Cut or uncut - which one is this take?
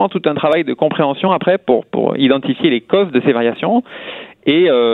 uncut